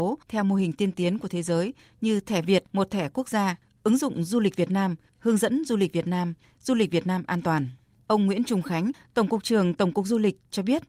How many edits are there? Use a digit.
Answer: 0